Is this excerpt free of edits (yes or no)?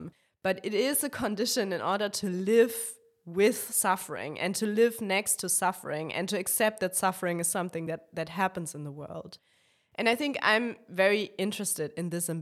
yes